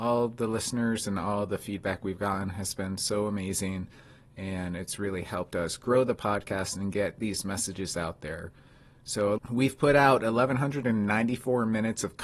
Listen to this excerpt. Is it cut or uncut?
uncut